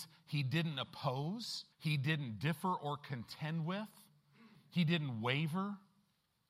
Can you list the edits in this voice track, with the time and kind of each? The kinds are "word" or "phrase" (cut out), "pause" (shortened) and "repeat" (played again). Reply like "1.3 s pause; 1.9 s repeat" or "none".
1.7 s pause

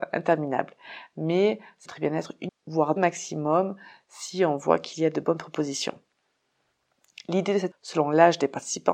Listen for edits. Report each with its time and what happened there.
1.9 s word; 2.5 s word; 3.0 s word; 7.7 s word

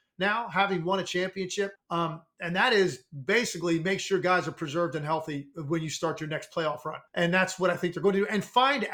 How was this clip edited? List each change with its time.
1.8 s pause; 7.1 s pause

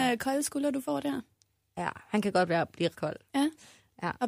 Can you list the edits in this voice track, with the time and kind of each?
2.9 s word

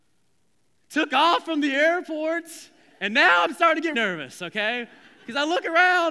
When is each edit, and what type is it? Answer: 3.9 s word

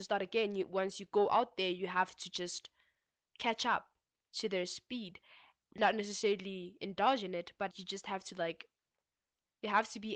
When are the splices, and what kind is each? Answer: 7.7 s word

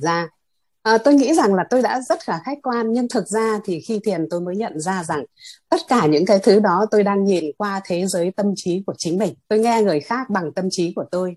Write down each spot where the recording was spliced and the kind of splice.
9.4 s pause

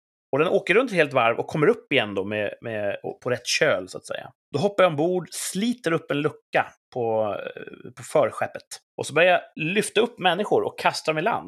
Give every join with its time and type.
4.4 s pause; 8.9 s pause

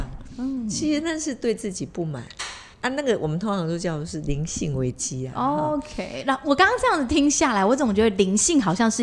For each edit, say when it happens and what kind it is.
2.7 s pause

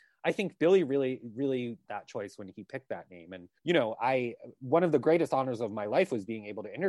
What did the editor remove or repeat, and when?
1.9 s phrase; 3.6 s pause; 4.0 s word

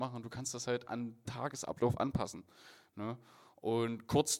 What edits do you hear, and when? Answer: 1.3 s word

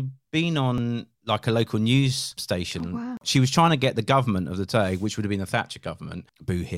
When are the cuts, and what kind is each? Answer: 1.1 s pause

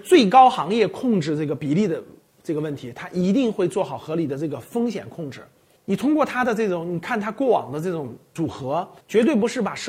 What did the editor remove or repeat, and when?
none

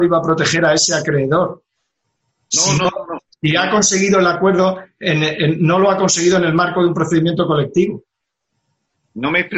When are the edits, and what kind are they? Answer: none

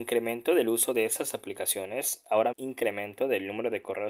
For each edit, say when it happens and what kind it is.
2.5 s phrase

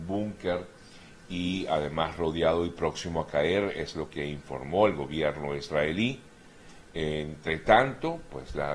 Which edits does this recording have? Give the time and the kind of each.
none

